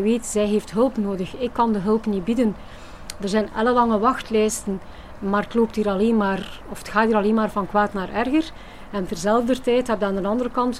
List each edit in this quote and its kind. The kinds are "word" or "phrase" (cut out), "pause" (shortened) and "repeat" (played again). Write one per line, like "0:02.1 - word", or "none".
none